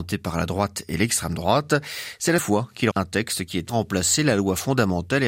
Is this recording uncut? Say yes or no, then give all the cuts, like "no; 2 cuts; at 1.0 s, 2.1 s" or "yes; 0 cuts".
no; 3 cuts; at 2.4 s, 2.9 s, 3.7 s